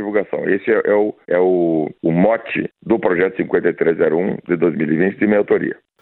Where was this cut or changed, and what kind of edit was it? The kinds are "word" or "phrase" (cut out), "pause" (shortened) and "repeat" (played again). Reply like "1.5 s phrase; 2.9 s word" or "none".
1.2 s pause; 2.0 s pause; 2.8 s pause